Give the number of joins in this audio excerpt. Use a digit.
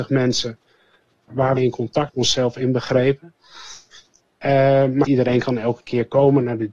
3